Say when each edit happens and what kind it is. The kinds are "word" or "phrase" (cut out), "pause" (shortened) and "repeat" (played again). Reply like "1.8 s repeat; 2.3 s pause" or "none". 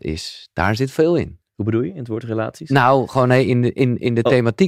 1.4 s pause